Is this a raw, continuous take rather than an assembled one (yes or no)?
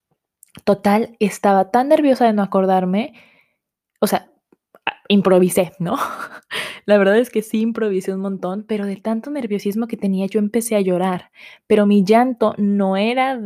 yes